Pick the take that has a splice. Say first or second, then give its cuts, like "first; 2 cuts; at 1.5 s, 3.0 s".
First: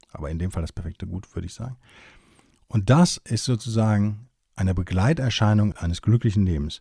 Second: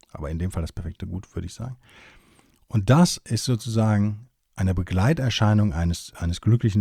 first; 1 cut; at 5.7 s